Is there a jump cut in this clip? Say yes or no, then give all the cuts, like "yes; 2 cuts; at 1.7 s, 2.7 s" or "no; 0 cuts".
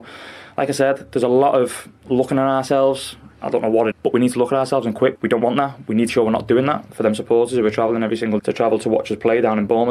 yes; 4 cuts; at 3.9 s, 5.2 s, 6.1 s, 8.4 s